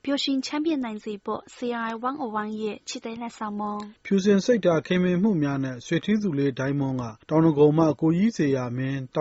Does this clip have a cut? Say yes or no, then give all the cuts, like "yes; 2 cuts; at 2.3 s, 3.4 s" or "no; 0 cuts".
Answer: yes; 2 cuts; at 4.0 s, 7.2 s